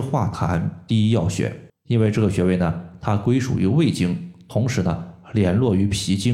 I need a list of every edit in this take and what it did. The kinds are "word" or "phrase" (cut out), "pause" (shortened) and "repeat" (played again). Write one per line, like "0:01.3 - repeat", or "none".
0:01.7 - pause